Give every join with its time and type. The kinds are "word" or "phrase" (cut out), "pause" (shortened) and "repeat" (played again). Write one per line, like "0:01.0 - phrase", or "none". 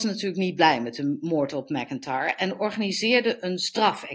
none